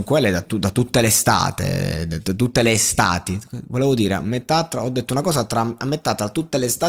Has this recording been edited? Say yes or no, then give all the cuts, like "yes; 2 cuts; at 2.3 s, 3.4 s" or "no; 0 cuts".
no; 0 cuts